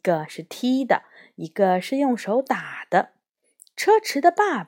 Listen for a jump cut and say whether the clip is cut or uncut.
uncut